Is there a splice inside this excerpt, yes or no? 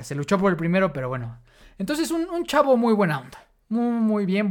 no